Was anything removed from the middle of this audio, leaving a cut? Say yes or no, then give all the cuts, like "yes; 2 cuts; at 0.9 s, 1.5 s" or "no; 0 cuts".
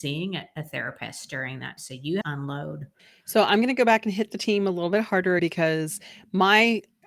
yes; 3 cuts; at 1.8 s, 2.2 s, 5.4 s